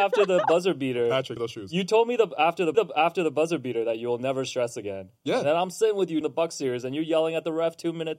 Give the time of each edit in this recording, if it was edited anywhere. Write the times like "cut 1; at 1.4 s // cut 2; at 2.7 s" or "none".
cut 1; at 1.4 s // cut 2; at 2.7 s // cut 3; at 6.2 s